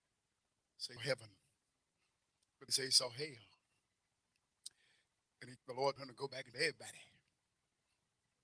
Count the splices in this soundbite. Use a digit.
5